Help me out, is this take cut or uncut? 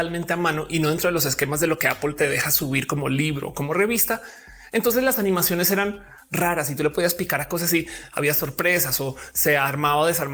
uncut